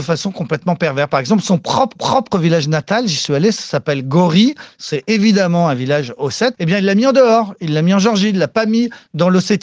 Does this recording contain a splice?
yes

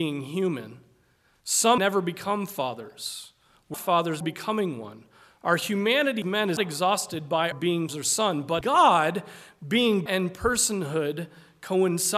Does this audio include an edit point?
yes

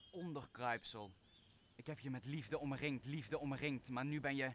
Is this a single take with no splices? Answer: no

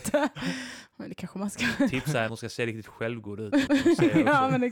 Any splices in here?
yes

